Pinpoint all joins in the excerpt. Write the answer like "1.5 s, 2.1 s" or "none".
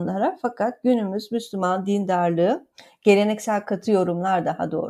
none